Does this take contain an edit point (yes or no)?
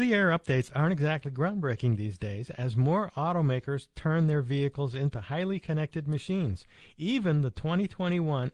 no